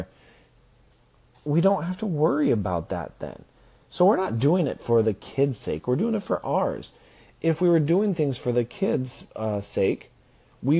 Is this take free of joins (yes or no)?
yes